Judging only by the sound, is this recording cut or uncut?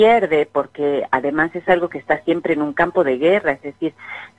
uncut